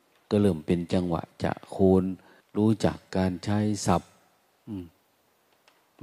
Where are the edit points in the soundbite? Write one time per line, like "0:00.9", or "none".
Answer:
0:02.4